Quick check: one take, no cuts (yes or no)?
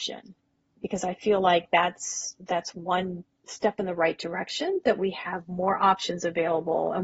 no